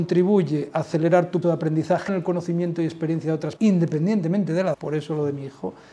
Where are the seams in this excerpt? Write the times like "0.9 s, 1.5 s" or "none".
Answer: 1.4 s, 2.1 s, 3.6 s, 4.7 s